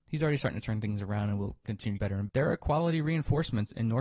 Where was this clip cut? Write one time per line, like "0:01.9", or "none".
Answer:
0:01.6
0:02.0
0:02.3